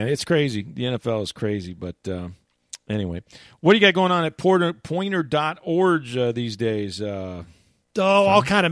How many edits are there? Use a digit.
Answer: 0